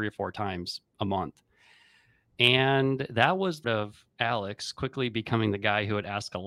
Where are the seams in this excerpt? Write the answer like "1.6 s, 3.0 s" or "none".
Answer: 3.6 s